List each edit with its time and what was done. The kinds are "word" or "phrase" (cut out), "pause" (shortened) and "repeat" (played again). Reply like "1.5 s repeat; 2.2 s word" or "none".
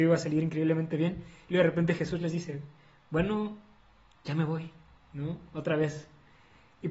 none